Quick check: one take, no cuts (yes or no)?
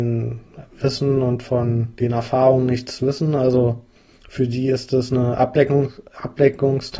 yes